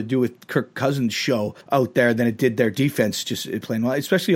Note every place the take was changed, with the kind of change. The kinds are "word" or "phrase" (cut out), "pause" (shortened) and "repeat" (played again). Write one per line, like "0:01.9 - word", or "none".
0:01.6 - pause